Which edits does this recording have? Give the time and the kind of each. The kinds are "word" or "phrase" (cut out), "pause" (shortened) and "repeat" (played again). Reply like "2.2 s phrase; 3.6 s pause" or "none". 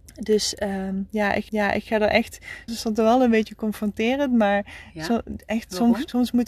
1.5 s repeat; 2.7 s word